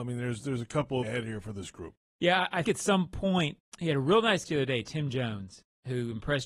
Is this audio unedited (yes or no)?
no